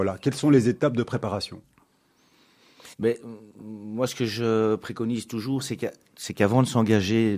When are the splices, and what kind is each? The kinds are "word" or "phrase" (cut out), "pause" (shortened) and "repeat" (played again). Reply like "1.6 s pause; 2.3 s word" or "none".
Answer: 2.9 s pause